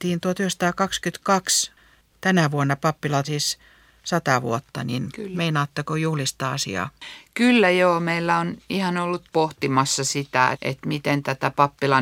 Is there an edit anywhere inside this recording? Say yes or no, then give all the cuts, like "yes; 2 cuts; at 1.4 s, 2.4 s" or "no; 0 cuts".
yes; 3 cuts; at 3.2 s, 9.3 s, 10.5 s